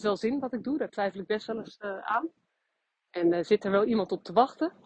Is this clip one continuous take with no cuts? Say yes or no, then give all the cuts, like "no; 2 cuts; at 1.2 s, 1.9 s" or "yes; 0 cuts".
yes; 0 cuts